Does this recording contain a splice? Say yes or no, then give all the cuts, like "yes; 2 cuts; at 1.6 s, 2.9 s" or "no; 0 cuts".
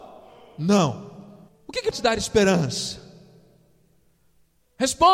yes; 2 cuts; at 1.5 s, 1.9 s